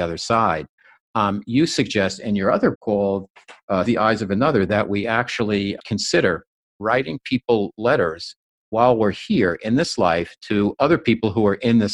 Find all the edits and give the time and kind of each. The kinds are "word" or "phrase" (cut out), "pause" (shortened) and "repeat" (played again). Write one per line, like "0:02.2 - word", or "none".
0:02.7 - word
0:03.9 - word
0:05.8 - word